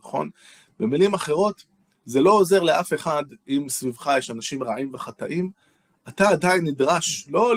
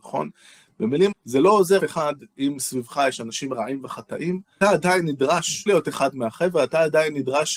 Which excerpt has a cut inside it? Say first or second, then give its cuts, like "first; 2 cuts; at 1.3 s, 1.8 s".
second; 4 cuts; at 1.1 s, 1.8 s, 4.6 s, 5.7 s